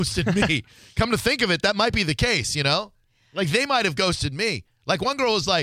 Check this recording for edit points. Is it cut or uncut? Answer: uncut